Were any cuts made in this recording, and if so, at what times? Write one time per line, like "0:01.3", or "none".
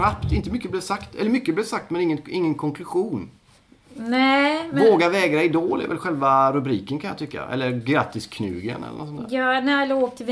none